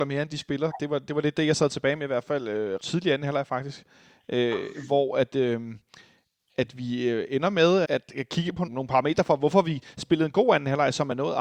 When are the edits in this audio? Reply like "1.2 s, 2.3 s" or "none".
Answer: 2.8 s, 7.8 s, 8.7 s